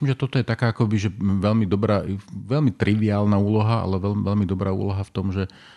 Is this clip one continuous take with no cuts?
yes; 0 cuts

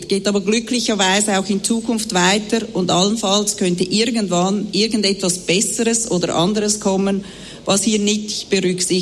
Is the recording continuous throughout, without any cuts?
yes; 0 cuts

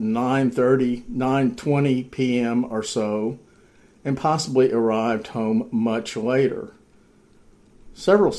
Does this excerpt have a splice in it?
no; 0 cuts

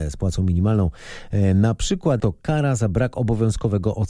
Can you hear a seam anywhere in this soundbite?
yes; 1 cut; at 2.2 s

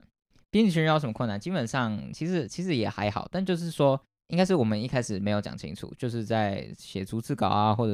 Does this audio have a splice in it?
yes; 1 cut; at 4.2 s

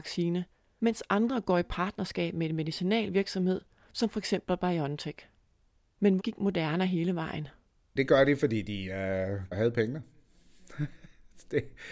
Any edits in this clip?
yes; 1 cut; at 6.2 s

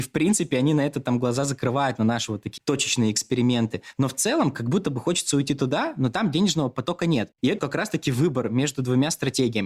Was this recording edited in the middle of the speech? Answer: yes; 2 cuts; at 2.6 s, 7.6 s

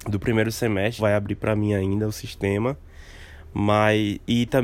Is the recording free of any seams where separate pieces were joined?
no; 1 cut; at 1.0 s

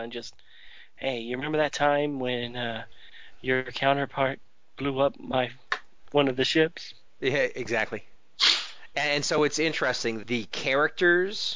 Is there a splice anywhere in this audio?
no; 0 cuts

